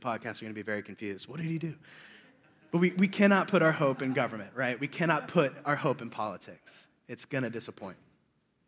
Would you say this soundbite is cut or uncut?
uncut